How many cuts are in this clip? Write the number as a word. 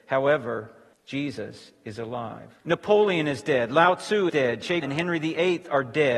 four